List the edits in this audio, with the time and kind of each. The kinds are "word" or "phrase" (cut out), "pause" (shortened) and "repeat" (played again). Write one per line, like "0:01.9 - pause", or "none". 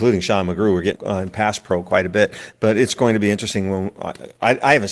0:00.9 - word